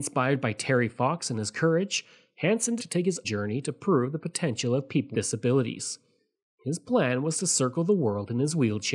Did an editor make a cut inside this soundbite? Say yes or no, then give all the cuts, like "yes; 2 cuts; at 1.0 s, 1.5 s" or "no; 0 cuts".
yes; 3 cuts; at 2.8 s, 3.2 s, 5.1 s